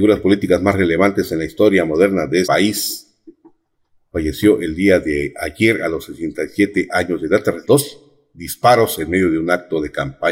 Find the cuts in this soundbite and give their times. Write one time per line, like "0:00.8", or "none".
0:02.4
0:07.6